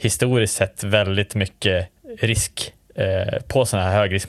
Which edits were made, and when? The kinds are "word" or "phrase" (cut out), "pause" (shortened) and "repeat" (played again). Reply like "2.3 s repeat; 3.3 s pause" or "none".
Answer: none